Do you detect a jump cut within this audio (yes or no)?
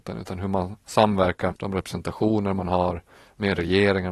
yes